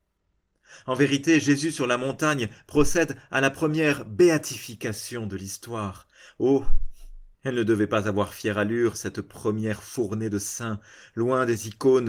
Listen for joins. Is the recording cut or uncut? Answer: cut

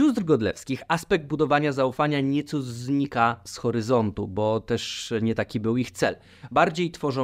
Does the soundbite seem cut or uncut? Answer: uncut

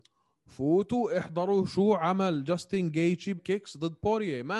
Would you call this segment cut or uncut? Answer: cut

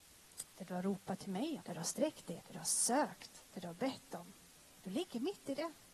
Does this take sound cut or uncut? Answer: cut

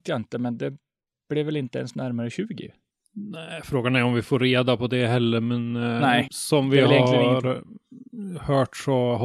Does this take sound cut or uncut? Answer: cut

